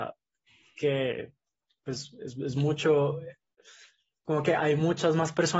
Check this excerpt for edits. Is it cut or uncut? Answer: uncut